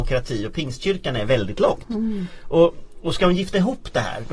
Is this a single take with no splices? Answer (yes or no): yes